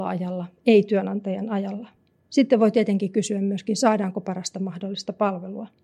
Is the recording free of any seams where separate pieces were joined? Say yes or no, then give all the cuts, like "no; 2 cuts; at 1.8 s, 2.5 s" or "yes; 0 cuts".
yes; 0 cuts